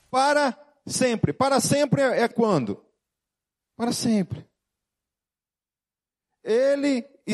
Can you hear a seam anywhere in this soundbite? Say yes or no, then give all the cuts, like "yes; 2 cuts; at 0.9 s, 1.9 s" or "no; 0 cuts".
yes; 1 cut; at 2.3 s